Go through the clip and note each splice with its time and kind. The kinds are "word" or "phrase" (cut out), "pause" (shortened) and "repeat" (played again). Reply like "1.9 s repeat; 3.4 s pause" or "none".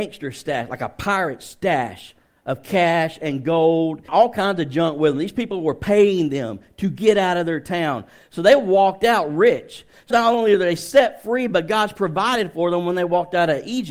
4.1 s word; 10.1 s word